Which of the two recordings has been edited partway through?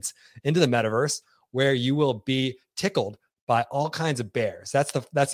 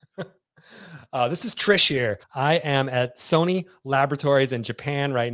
second; 1 cut; at 2.2 s

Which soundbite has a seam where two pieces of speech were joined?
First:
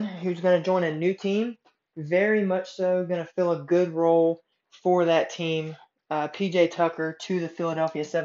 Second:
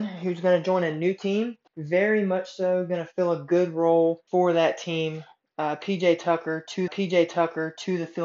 second; 3 cuts; at 1.7 s, 4.3 s, 6.9 s

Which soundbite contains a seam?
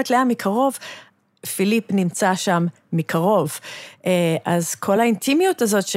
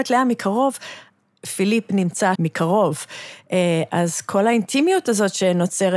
second; 1 cut; at 2.3 s

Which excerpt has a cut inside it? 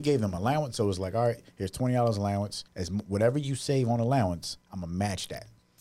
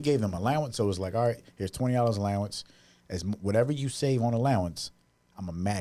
first; 2 cuts; at 2.7 s, 4.6 s

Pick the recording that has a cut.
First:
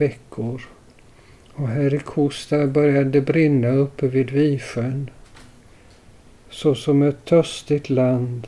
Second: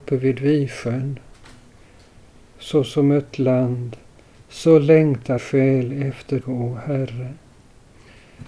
second; 3 cuts; at 3.3 s, 5.4 s, 6.4 s

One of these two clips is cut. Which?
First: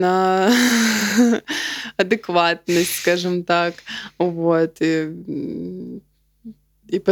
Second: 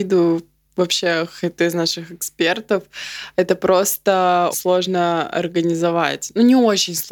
second; 2 cuts; at 1.6 s, 4.5 s

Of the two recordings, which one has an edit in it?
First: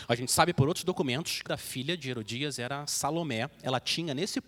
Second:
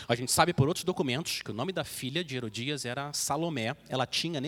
first; 1 cut; at 1.5 s

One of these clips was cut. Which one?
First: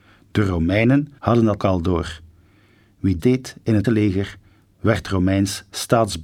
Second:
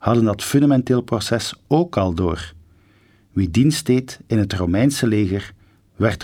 first; 4 cuts; at 1.2 s, 1.6 s, 3.2 s, 3.8 s

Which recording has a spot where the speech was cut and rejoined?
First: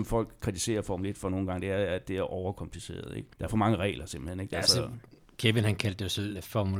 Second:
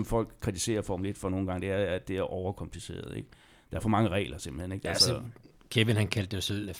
first; 1 cut; at 3.3 s

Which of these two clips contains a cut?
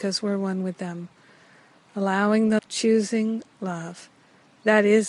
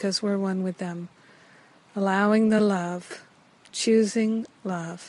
first; 1 cut; at 2.6 s

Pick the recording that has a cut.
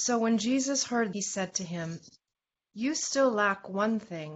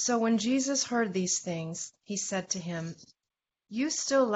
first; 1 cut; at 1.1 s

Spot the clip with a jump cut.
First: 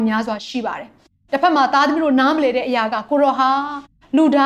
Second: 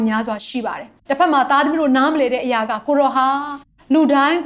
second; 1 cut; at 1.0 s

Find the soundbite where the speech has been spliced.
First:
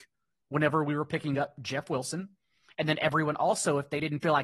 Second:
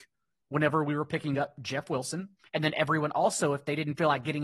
second; 1 cut; at 2.4 s

